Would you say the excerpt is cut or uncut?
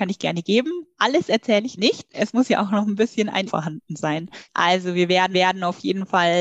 cut